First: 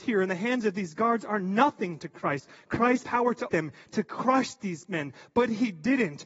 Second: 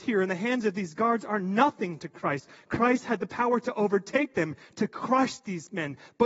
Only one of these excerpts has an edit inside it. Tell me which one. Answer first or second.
first